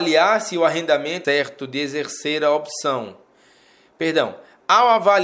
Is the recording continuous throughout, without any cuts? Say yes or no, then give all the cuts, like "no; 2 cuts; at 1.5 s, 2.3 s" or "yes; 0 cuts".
no; 1 cut; at 1.2 s